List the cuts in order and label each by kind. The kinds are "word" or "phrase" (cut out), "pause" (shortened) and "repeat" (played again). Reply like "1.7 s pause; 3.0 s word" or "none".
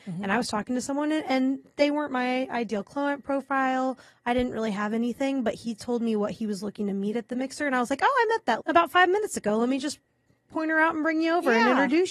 8.6 s word